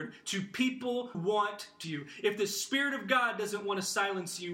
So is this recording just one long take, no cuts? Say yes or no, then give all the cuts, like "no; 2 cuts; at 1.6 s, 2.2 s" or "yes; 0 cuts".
no; 2 cuts; at 1.1 s, 1.8 s